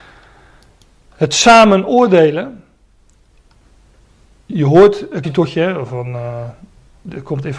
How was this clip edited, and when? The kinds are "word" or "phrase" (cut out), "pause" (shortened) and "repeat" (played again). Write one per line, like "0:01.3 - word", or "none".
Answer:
0:04.5 - word
0:05.2 - phrase